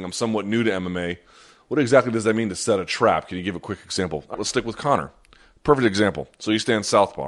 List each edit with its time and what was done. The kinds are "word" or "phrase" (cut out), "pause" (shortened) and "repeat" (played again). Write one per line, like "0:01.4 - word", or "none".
0:04.3 - word

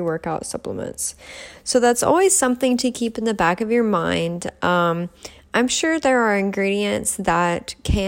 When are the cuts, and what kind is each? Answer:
none

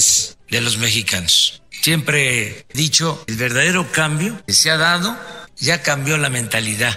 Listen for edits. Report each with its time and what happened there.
0:02.7 - word
0:03.3 - word
0:04.5 - word
0:05.5 - word

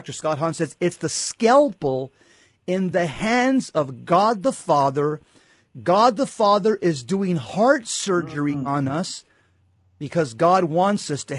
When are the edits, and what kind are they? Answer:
none

